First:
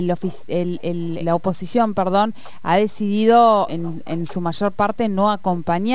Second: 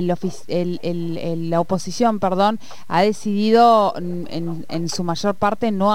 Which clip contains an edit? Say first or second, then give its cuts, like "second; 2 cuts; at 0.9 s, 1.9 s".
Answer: first; 2 cuts; at 1.2 s, 3.7 s